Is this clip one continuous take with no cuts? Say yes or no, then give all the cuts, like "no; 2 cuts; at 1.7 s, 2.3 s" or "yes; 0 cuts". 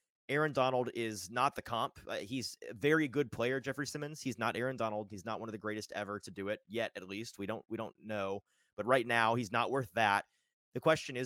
yes; 0 cuts